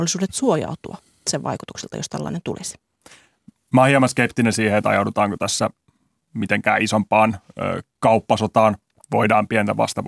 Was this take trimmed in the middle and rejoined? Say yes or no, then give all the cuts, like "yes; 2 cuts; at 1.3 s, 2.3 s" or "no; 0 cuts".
no; 0 cuts